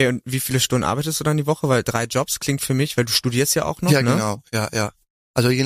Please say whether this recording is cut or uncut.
uncut